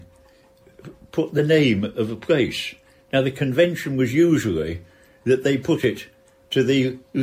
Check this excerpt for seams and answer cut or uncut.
uncut